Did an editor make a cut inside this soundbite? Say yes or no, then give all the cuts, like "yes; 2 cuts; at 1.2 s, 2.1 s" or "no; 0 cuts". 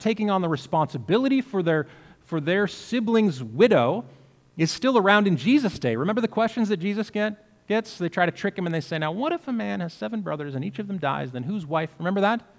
no; 0 cuts